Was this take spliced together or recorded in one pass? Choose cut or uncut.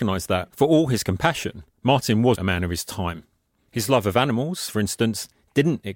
cut